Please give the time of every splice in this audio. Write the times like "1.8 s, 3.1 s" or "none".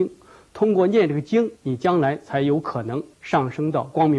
1.6 s, 3.1 s